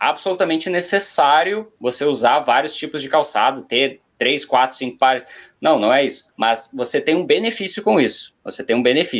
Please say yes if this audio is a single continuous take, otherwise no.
no